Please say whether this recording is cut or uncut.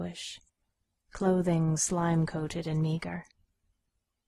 uncut